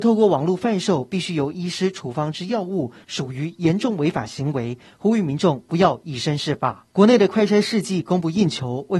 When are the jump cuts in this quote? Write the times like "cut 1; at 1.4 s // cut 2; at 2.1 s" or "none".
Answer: cut 1; at 6.9 s